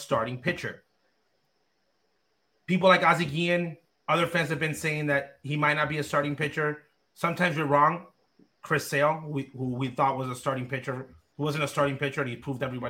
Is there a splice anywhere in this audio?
no; 0 cuts

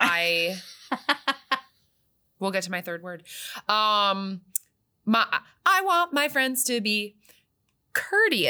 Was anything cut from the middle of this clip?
no; 0 cuts

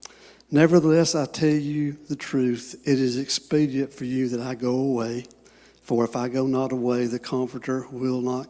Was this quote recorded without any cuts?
yes; 0 cuts

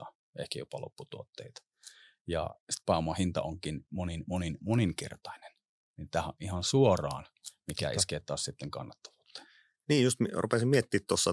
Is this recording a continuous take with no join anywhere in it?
yes; 0 cuts

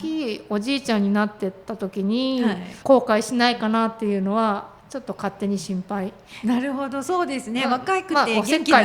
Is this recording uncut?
no; 1 cut; at 2.8 s

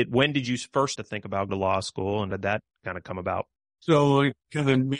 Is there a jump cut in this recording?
yes; 3 cuts; at 0.9 s, 1.5 s, 2.3 s

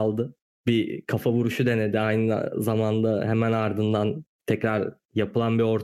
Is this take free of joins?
yes; 0 cuts

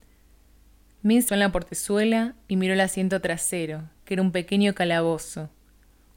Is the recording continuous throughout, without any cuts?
no; 2 cuts; at 1.3 s, 3.9 s

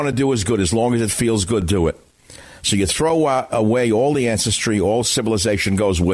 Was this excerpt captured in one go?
yes; 0 cuts

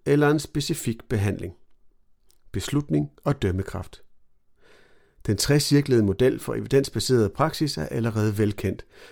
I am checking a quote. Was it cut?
no; 0 cuts

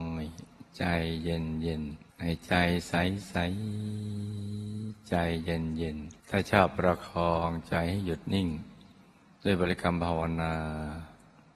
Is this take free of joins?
no; 2 cuts; at 2.1 s, 6.2 s

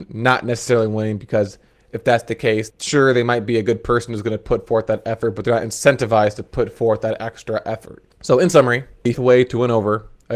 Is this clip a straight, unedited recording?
no; 3 cuts; at 2.7 s, 8.1 s, 9.1 s

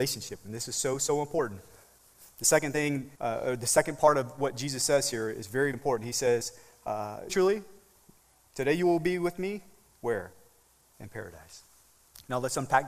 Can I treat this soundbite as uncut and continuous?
no; 3 cuts; at 3.2 s, 5.7 s, 7.3 s

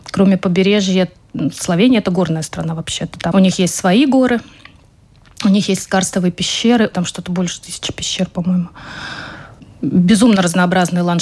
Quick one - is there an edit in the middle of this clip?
yes; 2 cuts; at 3.3 s, 6.9 s

